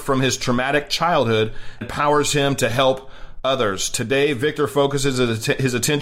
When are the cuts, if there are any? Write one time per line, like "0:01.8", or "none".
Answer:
0:01.8